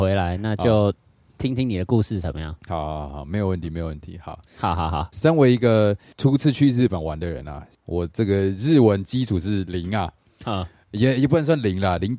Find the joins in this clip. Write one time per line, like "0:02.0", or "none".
none